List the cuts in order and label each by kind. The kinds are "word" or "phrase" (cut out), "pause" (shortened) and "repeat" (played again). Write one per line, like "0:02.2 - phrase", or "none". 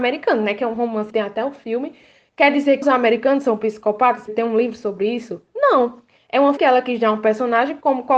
0:01.1 - word
0:02.8 - word
0:04.3 - word
0:06.6 - word